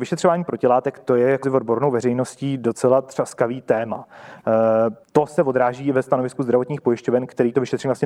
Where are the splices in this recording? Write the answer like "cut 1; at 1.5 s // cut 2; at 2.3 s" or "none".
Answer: cut 1; at 1.4 s // cut 2; at 5.0 s